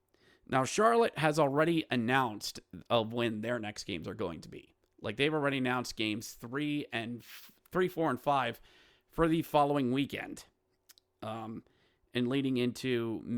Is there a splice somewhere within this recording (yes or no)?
no